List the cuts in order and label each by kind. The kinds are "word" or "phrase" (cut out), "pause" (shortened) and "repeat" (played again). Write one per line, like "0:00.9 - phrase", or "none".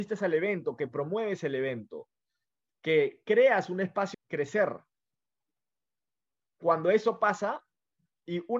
0:04.1 - phrase